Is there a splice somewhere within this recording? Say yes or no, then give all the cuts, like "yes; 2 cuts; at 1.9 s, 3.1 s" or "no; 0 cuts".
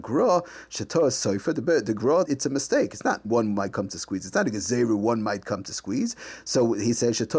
yes; 2 cuts; at 2.3 s, 3.2 s